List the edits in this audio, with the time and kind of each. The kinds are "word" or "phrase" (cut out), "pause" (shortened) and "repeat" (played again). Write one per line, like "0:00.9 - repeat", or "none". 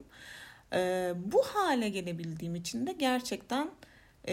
none